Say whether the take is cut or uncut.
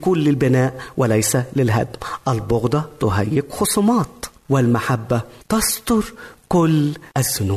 uncut